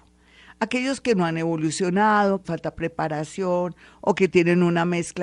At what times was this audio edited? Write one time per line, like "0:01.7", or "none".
0:02.4